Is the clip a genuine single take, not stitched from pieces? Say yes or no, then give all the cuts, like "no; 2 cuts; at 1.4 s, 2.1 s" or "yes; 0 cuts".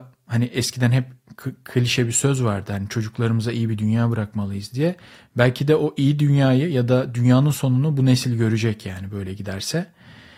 yes; 0 cuts